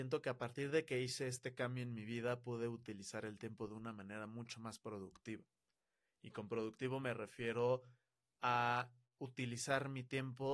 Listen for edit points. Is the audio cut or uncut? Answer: uncut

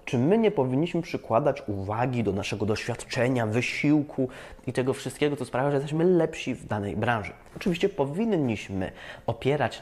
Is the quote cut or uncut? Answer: uncut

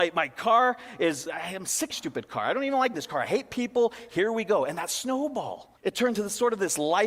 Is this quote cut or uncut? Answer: cut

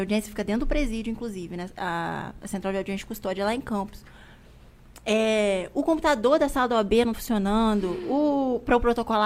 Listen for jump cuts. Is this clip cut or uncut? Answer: cut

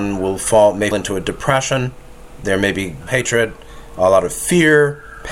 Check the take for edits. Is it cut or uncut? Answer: cut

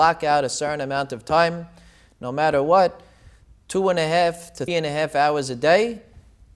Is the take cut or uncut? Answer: cut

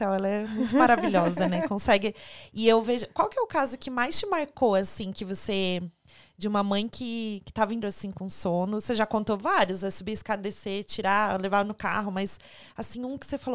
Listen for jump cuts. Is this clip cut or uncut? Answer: cut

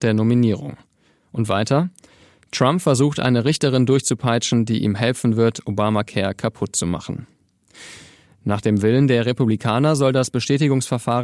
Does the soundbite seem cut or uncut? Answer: uncut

